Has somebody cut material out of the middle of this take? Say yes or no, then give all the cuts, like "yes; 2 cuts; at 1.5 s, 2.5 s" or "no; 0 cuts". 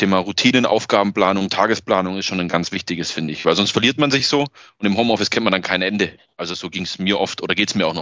no; 0 cuts